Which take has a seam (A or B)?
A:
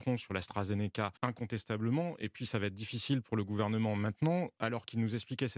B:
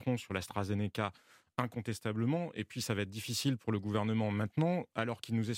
A